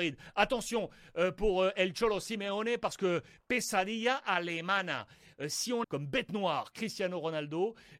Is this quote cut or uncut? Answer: cut